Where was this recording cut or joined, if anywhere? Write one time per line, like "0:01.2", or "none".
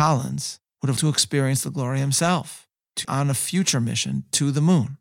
0:01.0
0:03.0